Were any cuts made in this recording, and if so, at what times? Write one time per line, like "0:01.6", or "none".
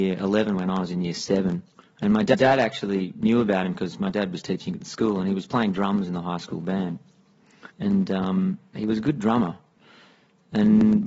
0:01.8
0:07.7